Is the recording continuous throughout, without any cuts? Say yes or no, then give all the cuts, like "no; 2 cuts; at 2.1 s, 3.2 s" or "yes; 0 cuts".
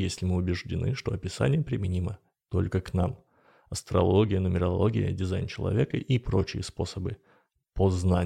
yes; 0 cuts